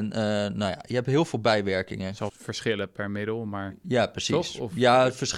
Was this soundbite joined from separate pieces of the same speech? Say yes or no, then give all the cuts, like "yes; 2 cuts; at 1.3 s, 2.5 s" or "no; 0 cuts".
yes; 1 cut; at 2.3 s